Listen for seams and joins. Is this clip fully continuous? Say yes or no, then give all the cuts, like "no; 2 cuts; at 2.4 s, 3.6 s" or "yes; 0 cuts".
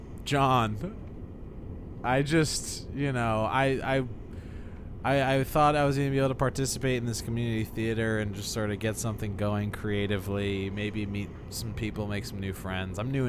yes; 0 cuts